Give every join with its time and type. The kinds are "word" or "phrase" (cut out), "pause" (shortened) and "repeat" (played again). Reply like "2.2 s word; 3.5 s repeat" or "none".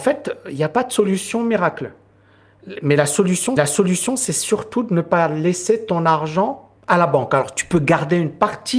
3.6 s repeat; 6.8 s pause